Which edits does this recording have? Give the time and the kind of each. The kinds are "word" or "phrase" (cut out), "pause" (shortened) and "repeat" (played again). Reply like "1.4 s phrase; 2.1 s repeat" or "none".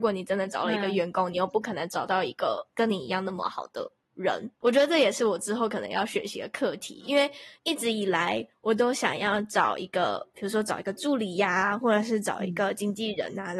7.6 s pause